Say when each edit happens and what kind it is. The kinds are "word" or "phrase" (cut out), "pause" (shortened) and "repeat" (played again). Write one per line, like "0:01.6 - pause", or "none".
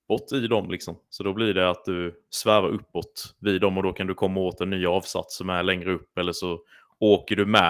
none